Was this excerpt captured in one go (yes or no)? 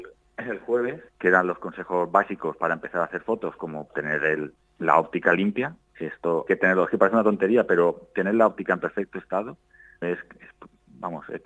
no